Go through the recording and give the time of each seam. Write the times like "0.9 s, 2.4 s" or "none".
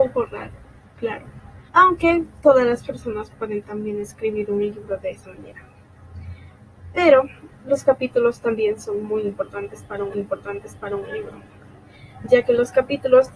1.7 s, 10.1 s